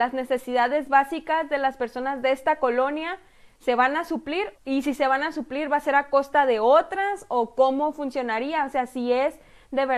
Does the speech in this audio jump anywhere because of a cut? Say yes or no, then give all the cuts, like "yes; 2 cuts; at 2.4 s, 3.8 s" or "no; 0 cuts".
yes; 1 cut; at 4.6 s